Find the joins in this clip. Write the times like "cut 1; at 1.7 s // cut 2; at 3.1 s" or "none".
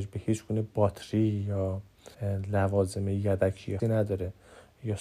cut 1; at 2.1 s // cut 2; at 3.8 s